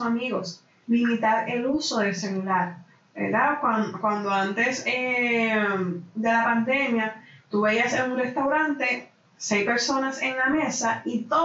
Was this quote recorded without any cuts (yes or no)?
yes